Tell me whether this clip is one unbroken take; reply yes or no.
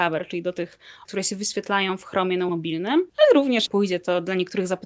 no